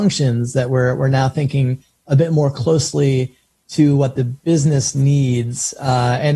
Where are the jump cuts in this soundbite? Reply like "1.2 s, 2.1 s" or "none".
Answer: none